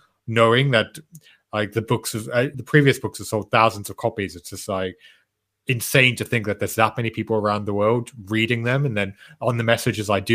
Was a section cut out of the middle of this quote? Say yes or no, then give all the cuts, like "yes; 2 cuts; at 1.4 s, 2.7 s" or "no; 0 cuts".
yes; 1 cut; at 2.5 s